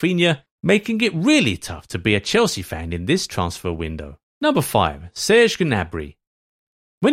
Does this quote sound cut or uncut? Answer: cut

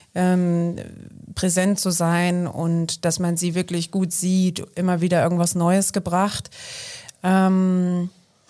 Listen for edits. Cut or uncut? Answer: uncut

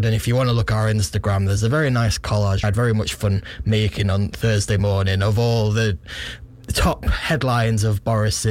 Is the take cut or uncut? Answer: cut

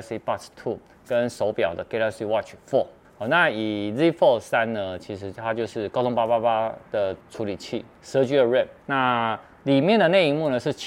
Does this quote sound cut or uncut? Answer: cut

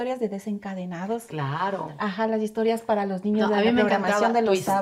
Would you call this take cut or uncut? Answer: uncut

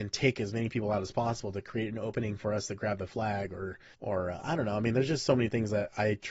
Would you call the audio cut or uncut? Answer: cut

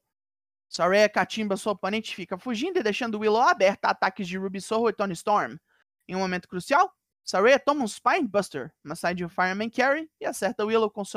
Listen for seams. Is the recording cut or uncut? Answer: uncut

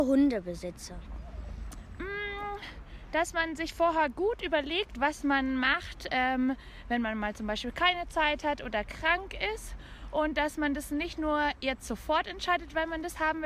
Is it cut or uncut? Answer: uncut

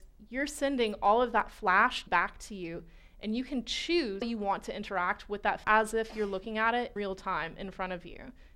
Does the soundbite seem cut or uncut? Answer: cut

